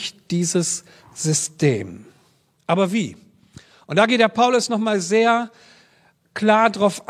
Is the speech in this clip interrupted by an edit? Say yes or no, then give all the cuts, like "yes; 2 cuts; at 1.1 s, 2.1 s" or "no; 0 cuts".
no; 0 cuts